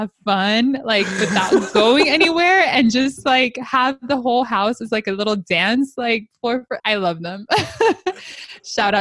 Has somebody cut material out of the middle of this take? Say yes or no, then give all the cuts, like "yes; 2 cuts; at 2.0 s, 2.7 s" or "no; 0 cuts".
yes; 1 cut; at 6.8 s